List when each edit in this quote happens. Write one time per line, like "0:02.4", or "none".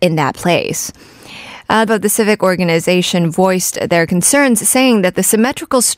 0:01.9